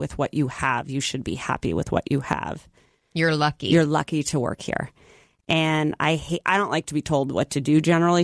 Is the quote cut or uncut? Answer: uncut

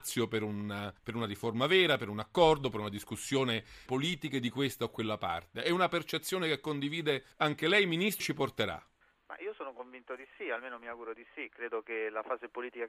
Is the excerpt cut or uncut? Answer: cut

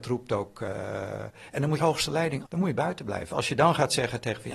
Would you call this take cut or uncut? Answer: cut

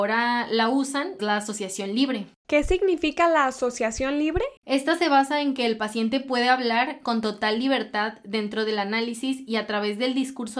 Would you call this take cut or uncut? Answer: cut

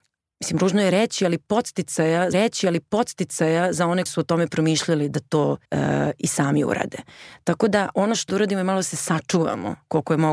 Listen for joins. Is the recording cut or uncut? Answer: cut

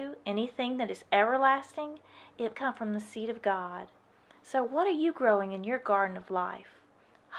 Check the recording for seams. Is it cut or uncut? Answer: cut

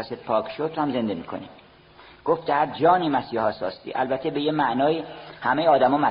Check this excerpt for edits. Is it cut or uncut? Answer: uncut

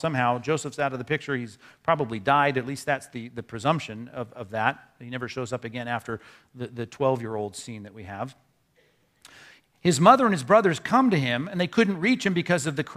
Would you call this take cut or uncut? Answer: uncut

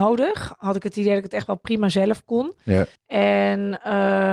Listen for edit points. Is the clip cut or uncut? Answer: cut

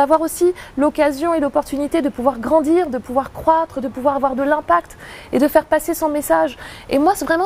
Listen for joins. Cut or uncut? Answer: uncut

